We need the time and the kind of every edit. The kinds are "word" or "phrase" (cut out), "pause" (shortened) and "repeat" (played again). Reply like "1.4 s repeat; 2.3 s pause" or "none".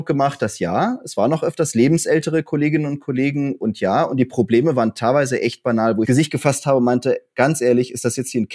6.0 s phrase